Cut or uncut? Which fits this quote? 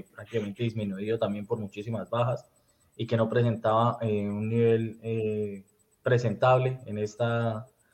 uncut